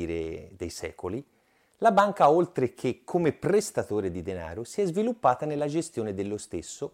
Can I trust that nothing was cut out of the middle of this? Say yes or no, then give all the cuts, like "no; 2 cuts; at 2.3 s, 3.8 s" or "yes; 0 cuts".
yes; 0 cuts